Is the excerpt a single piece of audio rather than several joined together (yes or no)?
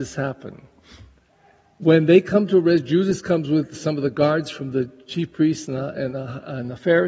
yes